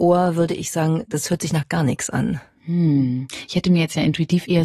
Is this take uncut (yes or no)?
yes